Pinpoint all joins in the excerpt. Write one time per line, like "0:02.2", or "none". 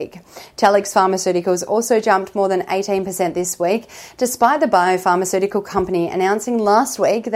none